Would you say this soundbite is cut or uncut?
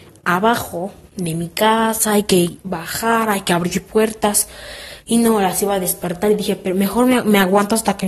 uncut